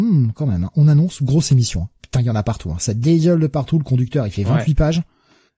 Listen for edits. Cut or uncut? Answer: uncut